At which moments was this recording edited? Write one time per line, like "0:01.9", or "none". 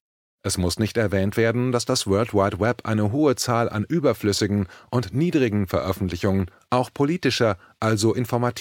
none